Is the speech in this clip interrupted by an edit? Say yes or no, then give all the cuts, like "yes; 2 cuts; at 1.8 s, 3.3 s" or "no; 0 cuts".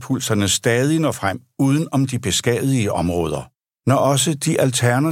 no; 0 cuts